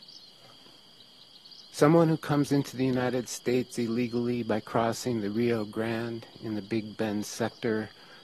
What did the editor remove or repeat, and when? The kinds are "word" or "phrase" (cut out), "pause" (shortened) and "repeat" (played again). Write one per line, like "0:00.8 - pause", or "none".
0:01.7 - pause